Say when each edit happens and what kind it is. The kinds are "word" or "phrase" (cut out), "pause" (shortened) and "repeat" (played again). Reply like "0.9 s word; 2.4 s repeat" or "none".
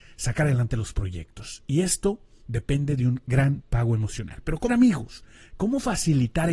4.7 s word